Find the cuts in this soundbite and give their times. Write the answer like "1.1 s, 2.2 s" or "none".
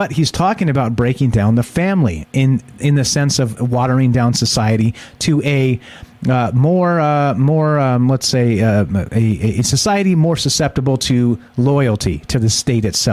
11.5 s